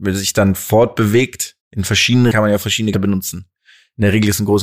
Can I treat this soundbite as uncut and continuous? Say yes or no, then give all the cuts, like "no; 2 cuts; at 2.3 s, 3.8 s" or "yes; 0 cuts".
no; 3 cuts; at 1.6 s, 2.3 s, 2.9 s